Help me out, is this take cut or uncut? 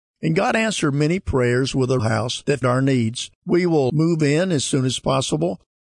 cut